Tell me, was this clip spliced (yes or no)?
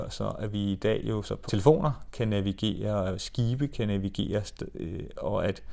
yes